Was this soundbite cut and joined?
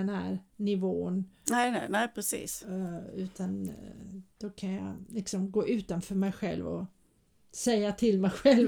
no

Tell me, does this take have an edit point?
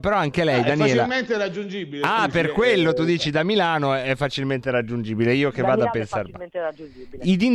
no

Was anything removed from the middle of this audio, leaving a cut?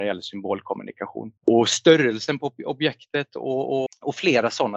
yes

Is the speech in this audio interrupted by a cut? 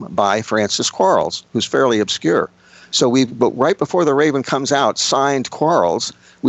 no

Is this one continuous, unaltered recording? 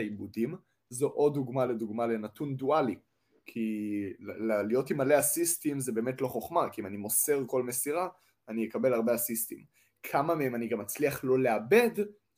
yes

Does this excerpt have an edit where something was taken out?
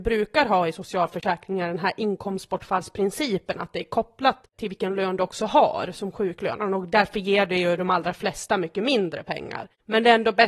no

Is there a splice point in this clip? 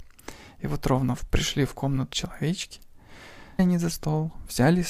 yes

